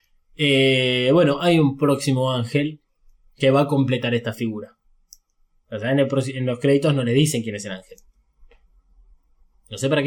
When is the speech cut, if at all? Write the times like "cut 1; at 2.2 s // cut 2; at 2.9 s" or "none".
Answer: none